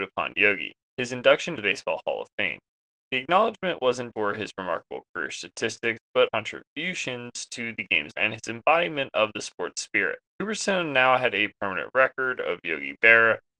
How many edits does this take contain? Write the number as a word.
five